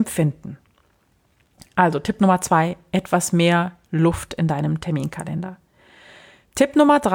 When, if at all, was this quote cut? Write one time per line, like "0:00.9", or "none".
none

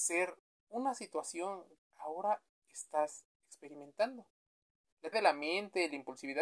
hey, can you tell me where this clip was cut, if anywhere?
0:01.9
0:05.1

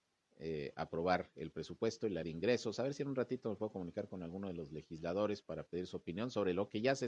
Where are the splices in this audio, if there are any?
0:02.2

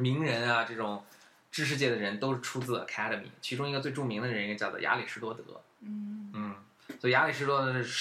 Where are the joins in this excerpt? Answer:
none

